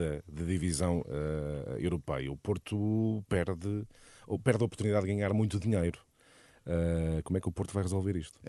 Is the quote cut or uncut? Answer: uncut